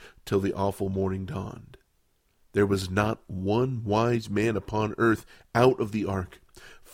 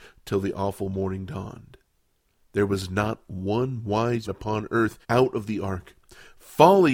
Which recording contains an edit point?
second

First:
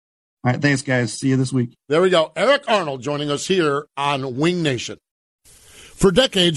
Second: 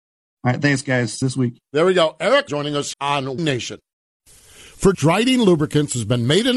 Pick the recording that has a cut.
second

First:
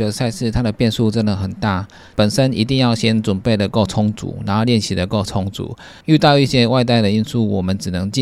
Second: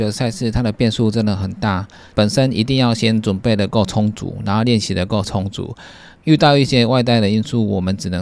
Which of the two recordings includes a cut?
first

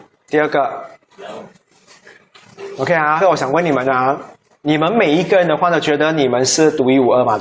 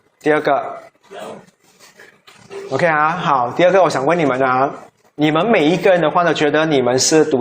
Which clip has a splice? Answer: first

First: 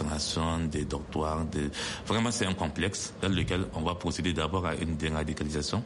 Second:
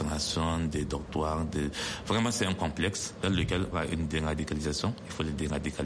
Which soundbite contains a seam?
second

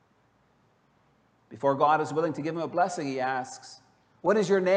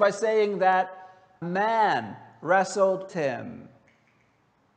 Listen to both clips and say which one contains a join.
second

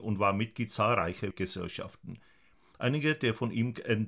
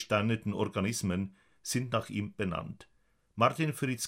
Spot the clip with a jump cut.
first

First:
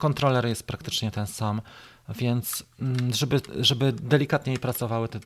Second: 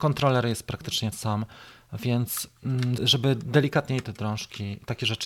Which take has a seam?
second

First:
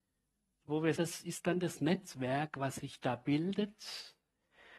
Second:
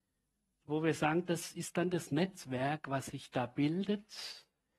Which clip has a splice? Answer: first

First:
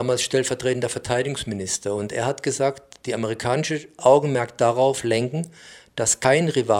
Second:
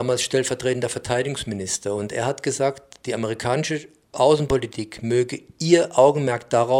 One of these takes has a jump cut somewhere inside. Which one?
first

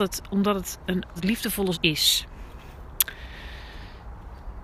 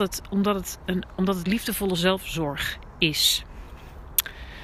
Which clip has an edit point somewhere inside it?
first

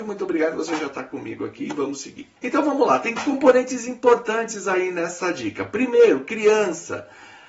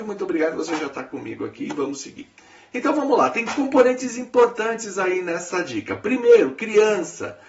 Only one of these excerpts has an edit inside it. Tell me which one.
first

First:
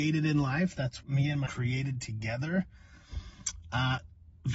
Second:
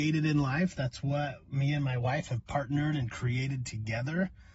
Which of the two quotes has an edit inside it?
first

